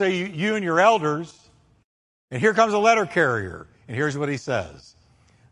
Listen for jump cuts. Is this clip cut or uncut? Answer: uncut